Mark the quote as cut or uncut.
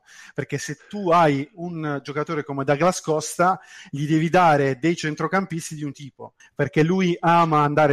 cut